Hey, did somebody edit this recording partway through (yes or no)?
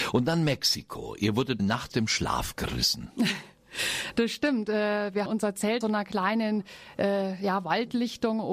yes